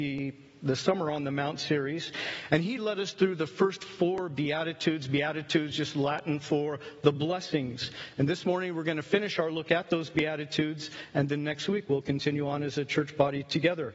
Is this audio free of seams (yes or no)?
yes